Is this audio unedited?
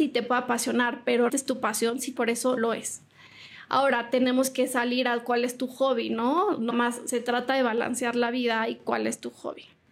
no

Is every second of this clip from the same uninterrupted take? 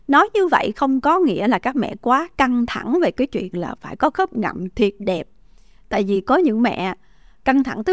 yes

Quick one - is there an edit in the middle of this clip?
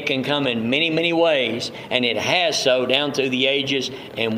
no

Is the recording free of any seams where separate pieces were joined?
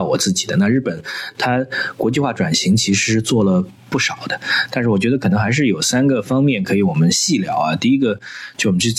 no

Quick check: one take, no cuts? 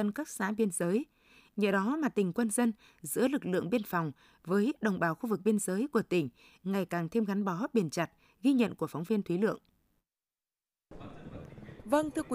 yes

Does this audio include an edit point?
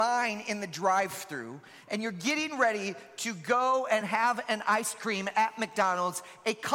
no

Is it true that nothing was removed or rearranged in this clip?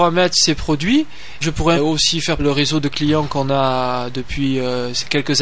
no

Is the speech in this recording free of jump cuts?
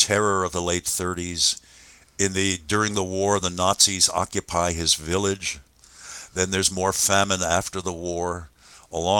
yes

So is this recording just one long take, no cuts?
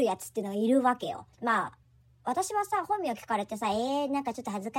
yes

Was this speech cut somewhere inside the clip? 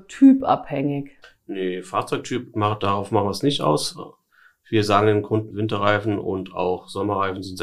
yes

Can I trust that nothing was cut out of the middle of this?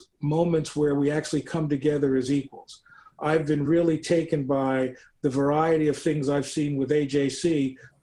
yes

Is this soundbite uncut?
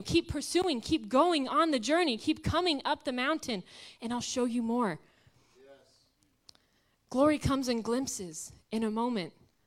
yes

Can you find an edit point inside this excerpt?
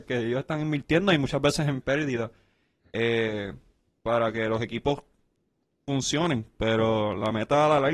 no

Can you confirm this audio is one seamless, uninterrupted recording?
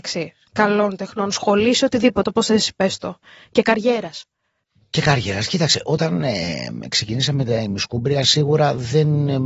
yes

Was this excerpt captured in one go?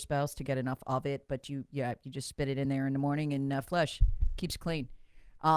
yes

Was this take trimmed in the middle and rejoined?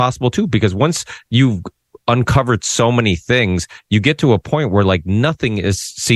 no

